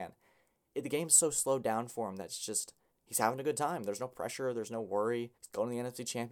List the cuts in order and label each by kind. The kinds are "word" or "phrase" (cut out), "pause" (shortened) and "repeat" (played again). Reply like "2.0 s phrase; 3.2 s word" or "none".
2.9 s pause; 5.3 s pause